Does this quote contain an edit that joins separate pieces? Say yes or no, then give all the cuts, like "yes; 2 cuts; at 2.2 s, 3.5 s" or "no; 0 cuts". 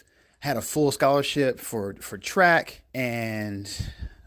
yes; 1 cut; at 2.9 s